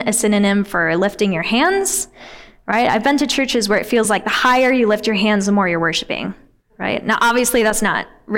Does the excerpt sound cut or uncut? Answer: uncut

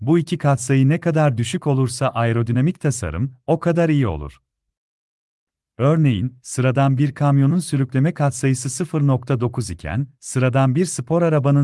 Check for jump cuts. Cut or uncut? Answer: uncut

